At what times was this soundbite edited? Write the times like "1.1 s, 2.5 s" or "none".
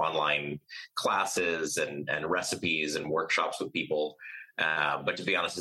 none